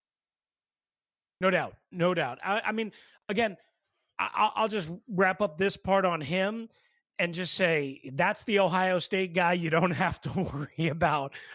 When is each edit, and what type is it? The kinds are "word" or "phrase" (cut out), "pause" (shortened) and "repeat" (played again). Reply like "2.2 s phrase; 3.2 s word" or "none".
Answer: none